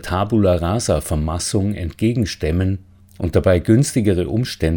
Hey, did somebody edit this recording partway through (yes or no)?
no